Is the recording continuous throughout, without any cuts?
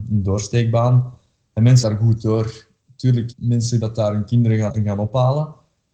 no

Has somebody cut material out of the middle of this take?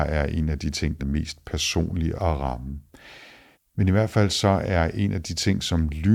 yes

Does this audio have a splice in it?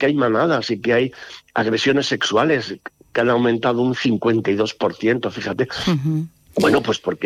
no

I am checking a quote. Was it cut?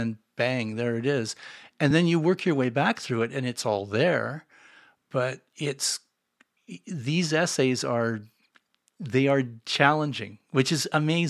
no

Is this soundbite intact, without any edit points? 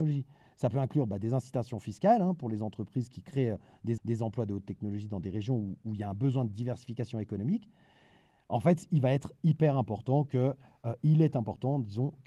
no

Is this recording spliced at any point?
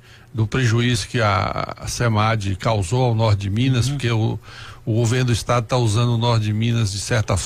no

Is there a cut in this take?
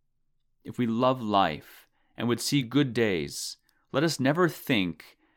no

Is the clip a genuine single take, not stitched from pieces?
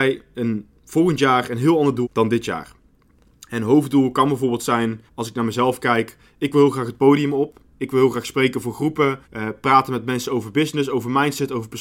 no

